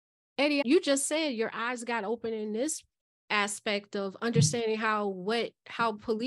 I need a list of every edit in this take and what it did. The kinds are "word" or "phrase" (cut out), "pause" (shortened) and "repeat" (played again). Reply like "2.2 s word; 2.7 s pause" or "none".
none